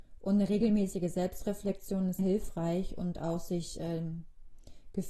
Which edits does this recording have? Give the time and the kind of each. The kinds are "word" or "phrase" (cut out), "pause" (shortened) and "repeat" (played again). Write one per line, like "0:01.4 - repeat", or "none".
0:02.2 - word